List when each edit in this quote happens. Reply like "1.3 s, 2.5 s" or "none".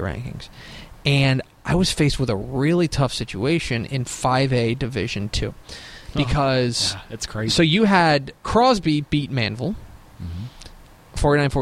8.4 s